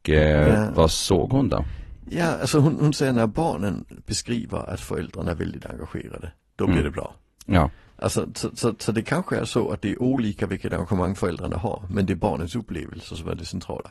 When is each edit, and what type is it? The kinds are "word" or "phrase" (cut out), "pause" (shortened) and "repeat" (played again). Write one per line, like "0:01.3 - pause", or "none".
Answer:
none